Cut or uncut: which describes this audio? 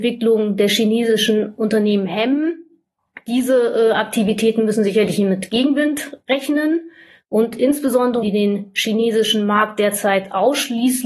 cut